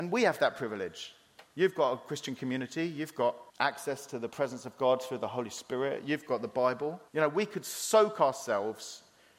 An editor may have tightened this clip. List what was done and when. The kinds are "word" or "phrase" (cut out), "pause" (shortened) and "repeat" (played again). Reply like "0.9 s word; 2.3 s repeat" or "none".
3.5 s pause; 7.1 s pause